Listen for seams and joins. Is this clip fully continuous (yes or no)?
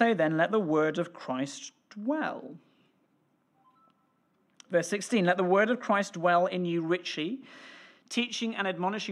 yes